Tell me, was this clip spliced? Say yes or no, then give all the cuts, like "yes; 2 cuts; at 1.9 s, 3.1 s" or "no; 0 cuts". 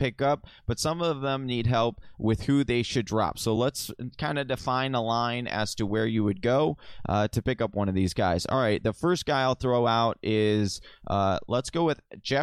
no; 0 cuts